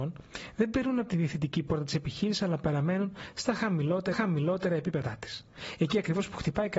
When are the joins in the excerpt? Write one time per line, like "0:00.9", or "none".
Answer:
0:04.1